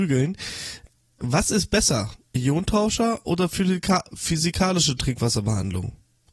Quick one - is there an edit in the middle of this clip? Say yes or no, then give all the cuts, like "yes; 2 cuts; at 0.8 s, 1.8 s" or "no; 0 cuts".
no; 0 cuts